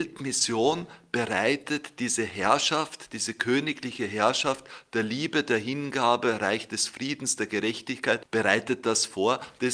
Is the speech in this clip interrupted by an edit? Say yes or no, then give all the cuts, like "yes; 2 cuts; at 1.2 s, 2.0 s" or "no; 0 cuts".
no; 0 cuts